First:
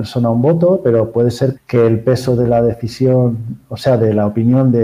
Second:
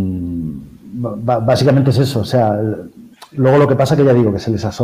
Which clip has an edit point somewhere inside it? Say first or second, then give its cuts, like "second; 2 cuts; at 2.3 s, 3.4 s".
first; 1 cut; at 1.6 s